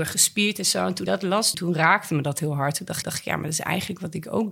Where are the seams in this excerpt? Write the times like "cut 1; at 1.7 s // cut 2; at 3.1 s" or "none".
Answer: cut 1; at 1.1 s // cut 2; at 1.5 s // cut 3; at 3.0 s